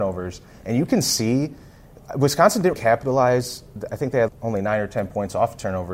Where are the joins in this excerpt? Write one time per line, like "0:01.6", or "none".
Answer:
0:02.7
0:04.3